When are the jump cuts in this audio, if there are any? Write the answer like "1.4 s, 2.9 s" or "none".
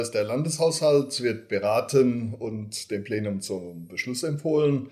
none